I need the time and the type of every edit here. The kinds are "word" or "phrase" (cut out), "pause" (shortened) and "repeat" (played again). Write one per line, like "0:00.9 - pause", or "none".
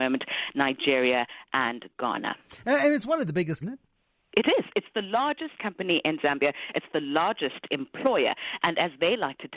0:03.6 - phrase

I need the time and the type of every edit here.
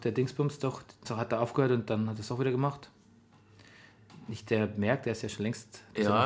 0:01.0 - word

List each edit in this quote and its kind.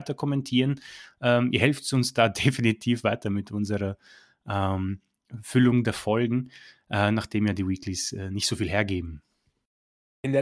none

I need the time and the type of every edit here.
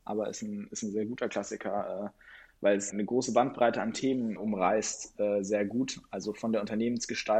0:02.9 - word
0:04.4 - word

